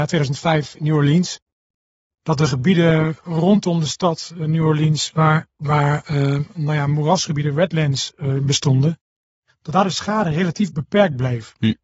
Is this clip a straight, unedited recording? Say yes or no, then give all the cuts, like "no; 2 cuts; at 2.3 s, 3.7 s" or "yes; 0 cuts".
yes; 0 cuts